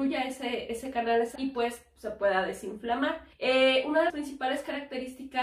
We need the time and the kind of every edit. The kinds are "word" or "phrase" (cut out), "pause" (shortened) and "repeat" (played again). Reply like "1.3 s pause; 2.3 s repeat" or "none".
1.4 s word; 3.3 s pause; 4.1 s word